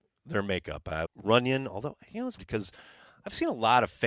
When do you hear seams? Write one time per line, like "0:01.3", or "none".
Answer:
0:01.1
0:02.4